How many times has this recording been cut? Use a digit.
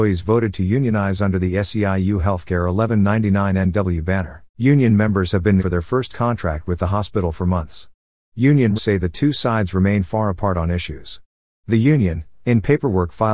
3